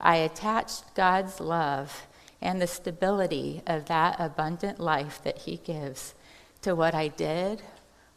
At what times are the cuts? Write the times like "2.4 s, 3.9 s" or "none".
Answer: none